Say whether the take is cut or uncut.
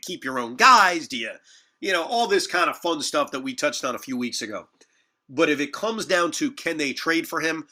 uncut